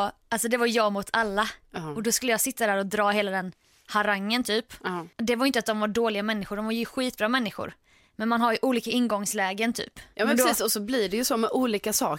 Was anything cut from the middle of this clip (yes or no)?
yes